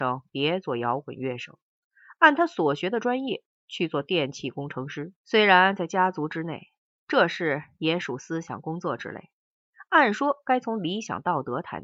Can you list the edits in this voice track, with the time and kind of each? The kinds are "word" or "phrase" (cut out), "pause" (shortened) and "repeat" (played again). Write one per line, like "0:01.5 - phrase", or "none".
0:05.2 - pause